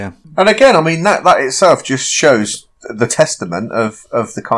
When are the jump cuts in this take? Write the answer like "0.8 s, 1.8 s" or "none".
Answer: none